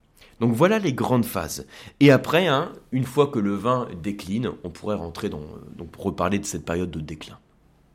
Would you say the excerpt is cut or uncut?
uncut